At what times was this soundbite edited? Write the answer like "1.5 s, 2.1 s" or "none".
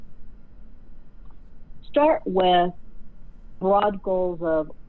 3.6 s